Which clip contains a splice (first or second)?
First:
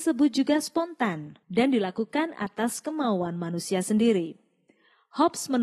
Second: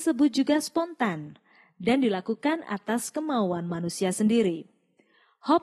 first